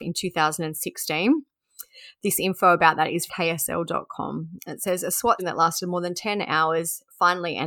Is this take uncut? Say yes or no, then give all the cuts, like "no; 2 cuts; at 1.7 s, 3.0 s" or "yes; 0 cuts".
no; 2 cuts; at 3.3 s, 5.4 s